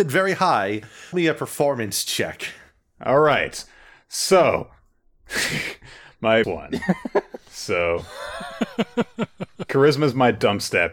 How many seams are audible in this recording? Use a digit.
2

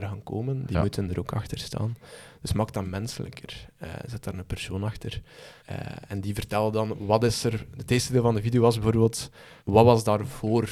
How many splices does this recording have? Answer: 3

